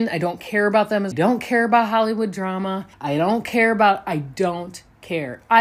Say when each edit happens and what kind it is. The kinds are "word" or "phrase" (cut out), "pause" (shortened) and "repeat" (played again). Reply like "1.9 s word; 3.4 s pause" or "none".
1.1 s phrase; 2.9 s pause